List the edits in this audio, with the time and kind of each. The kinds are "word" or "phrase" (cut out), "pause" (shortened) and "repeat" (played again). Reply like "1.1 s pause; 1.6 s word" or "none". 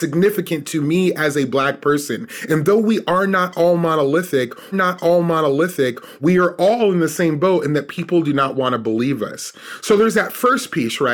4.7 s repeat